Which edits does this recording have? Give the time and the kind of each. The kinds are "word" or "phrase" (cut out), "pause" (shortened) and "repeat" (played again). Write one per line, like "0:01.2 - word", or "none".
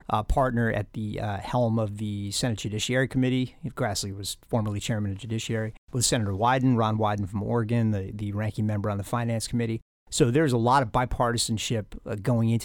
0:05.8 - pause